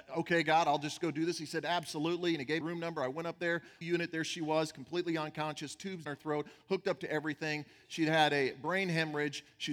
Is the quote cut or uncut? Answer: cut